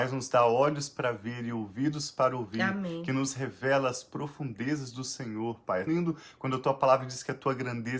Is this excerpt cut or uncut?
cut